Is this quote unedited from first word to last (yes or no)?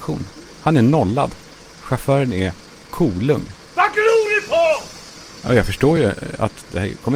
yes